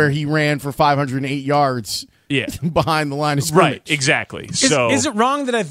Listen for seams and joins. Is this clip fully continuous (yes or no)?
yes